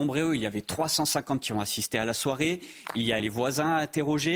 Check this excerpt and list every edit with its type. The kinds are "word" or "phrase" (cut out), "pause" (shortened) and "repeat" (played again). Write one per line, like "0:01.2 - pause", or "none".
0:01.4 - word
0:03.2 - word